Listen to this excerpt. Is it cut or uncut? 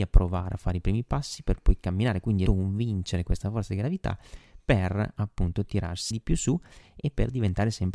cut